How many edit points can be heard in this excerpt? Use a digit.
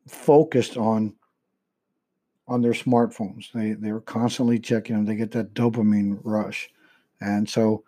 0